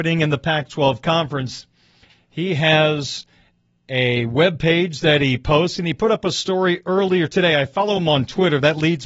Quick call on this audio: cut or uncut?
uncut